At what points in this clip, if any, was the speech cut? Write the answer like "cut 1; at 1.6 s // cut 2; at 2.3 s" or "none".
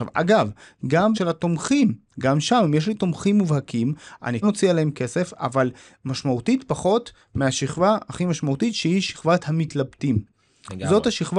cut 1; at 1.1 s // cut 2; at 4.4 s